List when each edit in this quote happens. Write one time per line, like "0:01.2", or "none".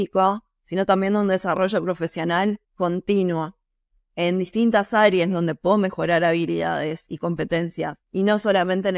0:02.6
0:08.0